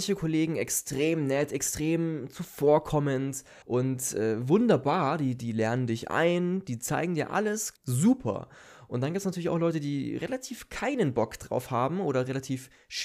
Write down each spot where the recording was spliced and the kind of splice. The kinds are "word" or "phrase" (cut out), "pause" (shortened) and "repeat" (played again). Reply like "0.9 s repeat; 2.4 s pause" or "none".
3.6 s pause; 7.8 s pause